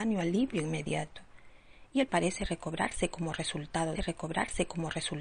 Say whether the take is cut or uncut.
cut